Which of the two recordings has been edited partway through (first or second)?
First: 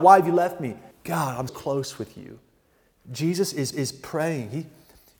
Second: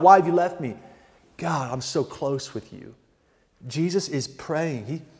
first